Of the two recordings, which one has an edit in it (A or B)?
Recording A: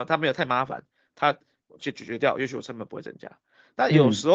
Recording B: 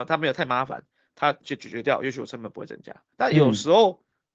B